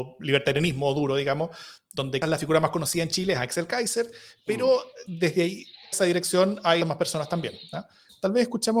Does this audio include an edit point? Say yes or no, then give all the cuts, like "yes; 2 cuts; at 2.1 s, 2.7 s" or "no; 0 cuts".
yes; 3 cuts; at 2.2 s, 5.9 s, 6.8 s